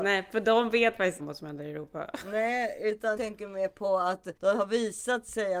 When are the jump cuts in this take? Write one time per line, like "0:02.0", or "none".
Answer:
0:01.2
0:03.2
0:04.4

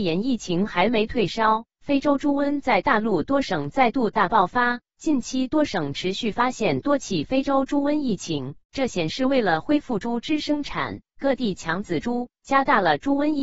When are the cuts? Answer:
0:08.6

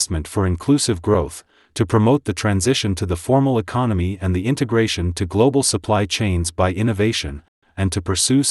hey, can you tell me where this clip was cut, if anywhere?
none

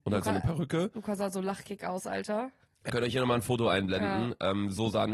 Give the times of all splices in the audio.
0:02.9

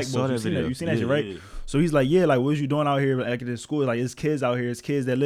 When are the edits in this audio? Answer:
none

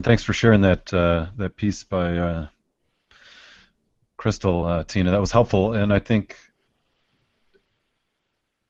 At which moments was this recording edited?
none

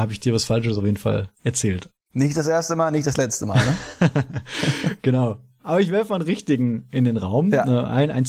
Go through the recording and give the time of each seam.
0:02.0

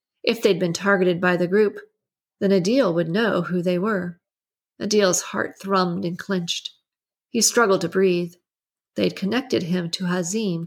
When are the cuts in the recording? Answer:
0:04.4

